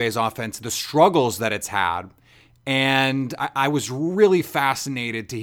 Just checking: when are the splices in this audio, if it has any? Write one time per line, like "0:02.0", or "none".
none

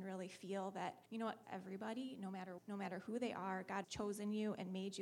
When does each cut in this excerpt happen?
0:01.1
0:01.4
0:02.6
0:03.8

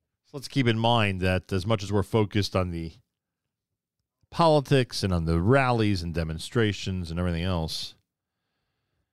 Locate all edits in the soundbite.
none

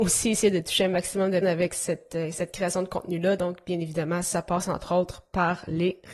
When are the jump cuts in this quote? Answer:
0:01.4

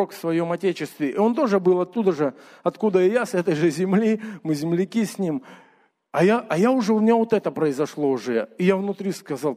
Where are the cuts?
none

